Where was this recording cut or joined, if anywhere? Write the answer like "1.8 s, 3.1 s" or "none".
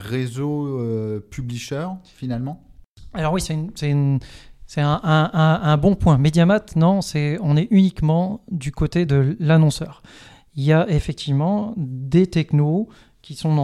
none